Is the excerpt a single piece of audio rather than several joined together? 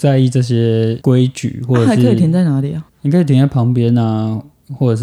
no; 1 cut; at 2.9 s

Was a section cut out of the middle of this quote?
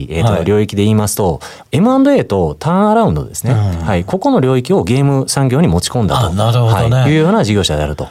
no; 0 cuts

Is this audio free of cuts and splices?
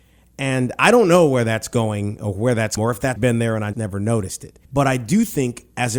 no; 4 cuts; at 2.8 s, 3.2 s, 3.7 s, 4.6 s

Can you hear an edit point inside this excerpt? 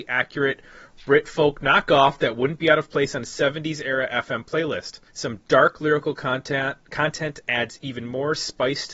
yes; 2 cuts; at 5.1 s, 6.8 s

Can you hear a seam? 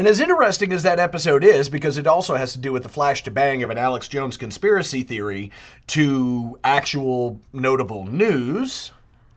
no; 0 cuts

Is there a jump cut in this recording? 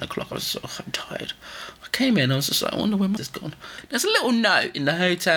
yes; 1 cut; at 3.2 s

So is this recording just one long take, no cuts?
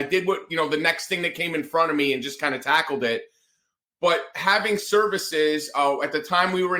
yes; 0 cuts

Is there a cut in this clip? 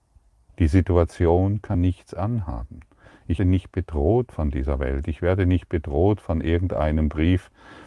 yes; 2 cuts; at 1.7 s, 3.4 s

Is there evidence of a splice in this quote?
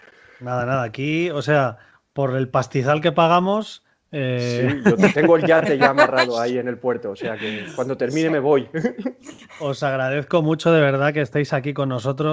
no; 0 cuts

